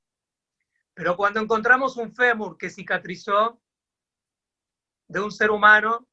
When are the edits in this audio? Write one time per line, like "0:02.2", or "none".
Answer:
none